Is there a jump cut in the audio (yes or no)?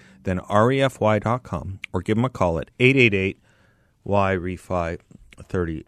no